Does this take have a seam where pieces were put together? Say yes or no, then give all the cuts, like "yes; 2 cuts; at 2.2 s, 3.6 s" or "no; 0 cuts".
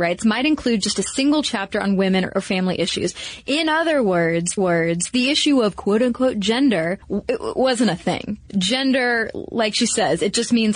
yes; 3 cuts; at 4.6 s, 7.0 s, 8.5 s